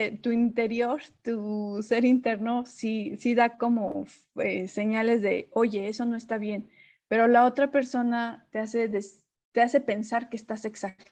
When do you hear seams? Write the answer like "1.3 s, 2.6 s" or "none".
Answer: none